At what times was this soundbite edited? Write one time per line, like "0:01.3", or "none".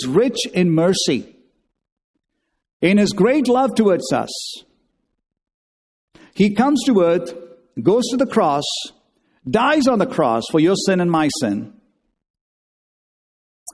none